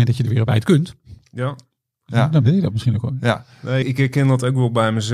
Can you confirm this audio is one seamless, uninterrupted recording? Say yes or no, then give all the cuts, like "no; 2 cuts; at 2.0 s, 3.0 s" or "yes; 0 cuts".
no; 1 cut; at 3.8 s